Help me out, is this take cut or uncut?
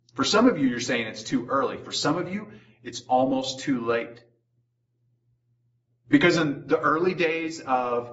uncut